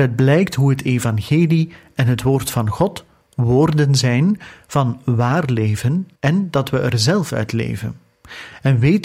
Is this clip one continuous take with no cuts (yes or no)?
no